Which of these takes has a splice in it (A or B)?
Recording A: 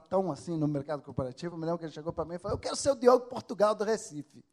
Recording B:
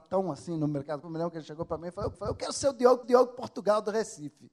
B